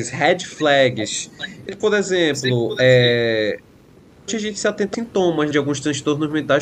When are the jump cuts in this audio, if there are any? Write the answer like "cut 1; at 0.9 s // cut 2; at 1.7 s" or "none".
cut 1; at 1.7 s // cut 2; at 4.3 s // cut 3; at 4.9 s // cut 4; at 5.5 s